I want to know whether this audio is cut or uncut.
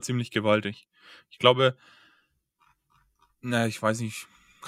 uncut